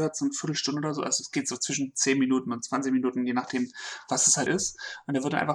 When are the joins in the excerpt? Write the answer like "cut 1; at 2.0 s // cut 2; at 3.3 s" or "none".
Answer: cut 1; at 4.5 s